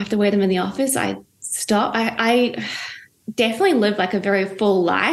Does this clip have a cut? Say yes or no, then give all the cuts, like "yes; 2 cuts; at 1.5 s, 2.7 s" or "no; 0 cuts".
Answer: no; 0 cuts